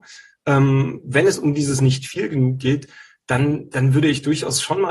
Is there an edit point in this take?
no; 0 cuts

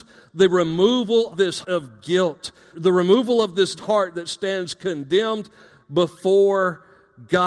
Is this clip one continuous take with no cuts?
no; 4 cuts; at 1.3 s, 1.6 s, 2.7 s, 3.8 s

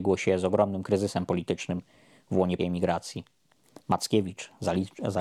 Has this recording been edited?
yes; 1 cut; at 2.6 s

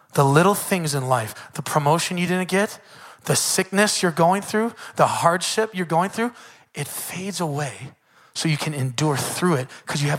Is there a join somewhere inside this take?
no; 0 cuts

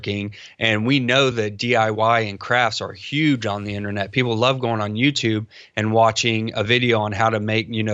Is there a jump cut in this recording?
no; 0 cuts

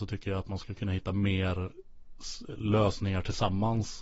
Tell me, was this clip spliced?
no; 0 cuts

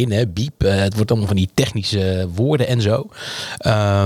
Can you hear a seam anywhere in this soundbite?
no; 0 cuts

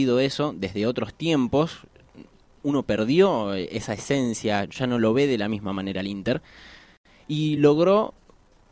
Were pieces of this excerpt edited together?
no; 0 cuts

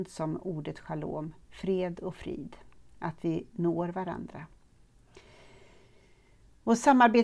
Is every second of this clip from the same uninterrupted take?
no; 1 cut; at 1.4 s

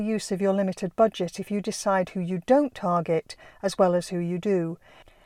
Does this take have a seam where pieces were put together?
no; 0 cuts

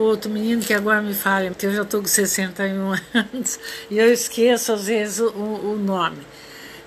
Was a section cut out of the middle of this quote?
yes; 1 cut; at 1.5 s

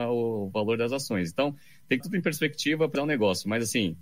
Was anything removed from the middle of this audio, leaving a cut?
yes; 2 cuts; at 2.0 s, 2.9 s

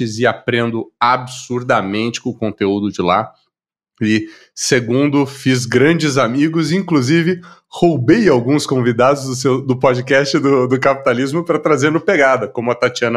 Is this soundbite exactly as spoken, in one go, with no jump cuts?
yes; 0 cuts

